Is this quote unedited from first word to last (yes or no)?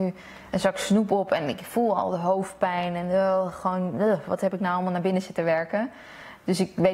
yes